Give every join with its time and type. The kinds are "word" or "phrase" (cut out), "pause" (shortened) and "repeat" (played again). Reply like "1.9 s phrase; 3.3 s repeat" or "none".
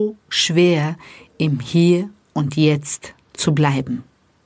none